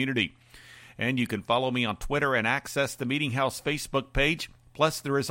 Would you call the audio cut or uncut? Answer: uncut